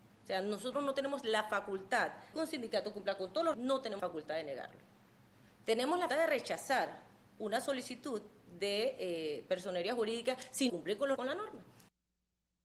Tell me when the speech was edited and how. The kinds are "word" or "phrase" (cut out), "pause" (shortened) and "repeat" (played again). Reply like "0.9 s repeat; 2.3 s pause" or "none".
2.3 s word; 3.5 s word; 4.0 s word; 6.1 s word; 10.7 s word; 11.2 s word